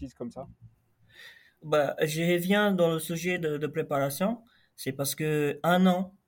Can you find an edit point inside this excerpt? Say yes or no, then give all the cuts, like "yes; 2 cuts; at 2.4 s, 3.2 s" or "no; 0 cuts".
no; 0 cuts